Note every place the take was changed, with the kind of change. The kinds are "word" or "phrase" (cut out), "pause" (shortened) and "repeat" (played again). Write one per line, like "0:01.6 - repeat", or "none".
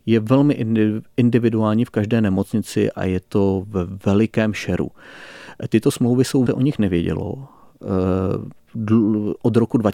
0:06.5 - phrase